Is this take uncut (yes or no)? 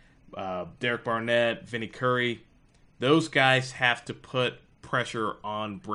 yes